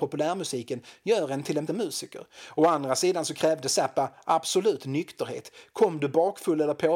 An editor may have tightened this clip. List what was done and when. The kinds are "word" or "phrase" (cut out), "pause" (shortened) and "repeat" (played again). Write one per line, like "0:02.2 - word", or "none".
0:01.7 - word